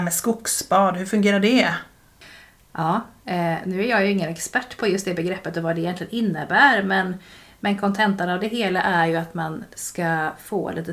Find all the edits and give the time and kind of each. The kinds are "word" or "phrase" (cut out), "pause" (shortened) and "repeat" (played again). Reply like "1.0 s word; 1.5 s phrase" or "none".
none